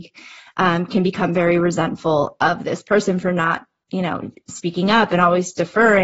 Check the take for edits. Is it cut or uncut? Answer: uncut